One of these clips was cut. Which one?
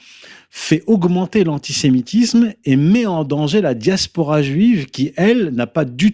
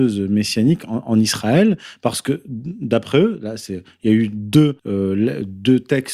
second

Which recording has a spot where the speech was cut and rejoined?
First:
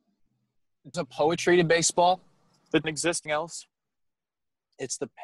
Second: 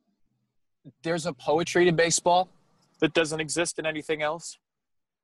first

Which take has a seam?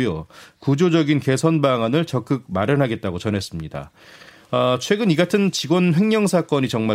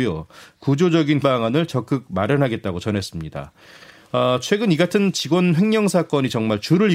second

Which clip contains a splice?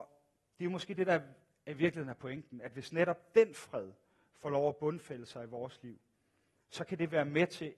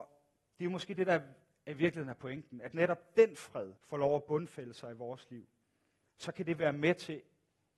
second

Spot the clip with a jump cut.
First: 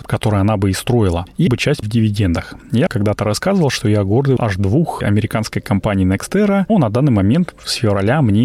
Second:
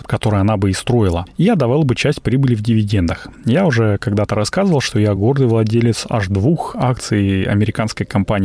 first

